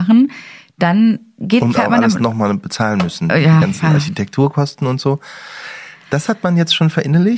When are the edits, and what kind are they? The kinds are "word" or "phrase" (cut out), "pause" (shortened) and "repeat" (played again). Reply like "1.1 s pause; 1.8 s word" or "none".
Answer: none